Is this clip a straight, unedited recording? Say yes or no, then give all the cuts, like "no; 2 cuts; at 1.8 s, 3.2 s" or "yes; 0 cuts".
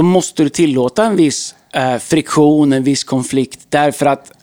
yes; 0 cuts